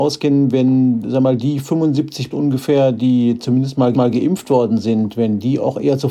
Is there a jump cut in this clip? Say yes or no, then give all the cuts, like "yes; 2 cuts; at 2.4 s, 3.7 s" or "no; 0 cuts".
yes; 2 cuts; at 2.3 s, 3.9 s